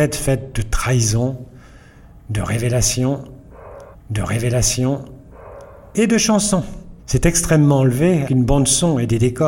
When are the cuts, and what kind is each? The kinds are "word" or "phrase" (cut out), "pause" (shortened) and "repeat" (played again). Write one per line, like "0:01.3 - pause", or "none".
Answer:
0:03.9 - repeat
0:07.0 - pause
0:08.3 - word